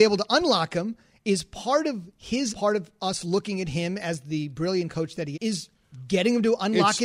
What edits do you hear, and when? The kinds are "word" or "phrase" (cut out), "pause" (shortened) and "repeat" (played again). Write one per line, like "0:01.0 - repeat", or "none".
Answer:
0:02.5 - phrase
0:05.3 - word